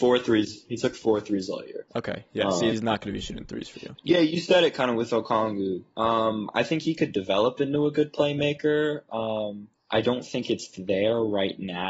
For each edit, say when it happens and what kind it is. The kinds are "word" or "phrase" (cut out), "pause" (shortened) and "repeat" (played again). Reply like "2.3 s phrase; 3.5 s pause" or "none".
1.9 s pause; 2.7 s word; 4.0 s pause; 9.7 s pause